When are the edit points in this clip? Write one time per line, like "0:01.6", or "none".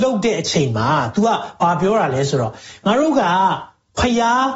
none